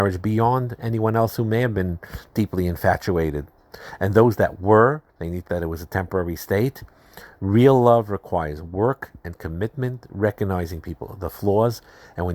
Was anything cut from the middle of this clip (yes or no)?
yes